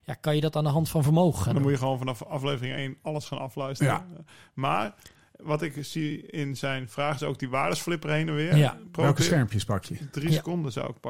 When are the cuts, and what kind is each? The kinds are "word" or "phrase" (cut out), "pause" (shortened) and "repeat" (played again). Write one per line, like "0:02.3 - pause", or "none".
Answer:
none